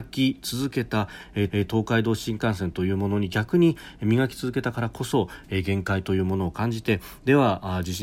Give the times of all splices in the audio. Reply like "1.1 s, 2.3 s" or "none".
1.5 s